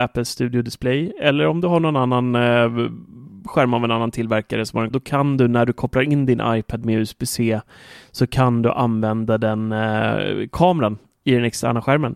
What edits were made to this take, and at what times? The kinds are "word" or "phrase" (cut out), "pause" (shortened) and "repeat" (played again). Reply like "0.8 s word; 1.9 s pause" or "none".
4.9 s word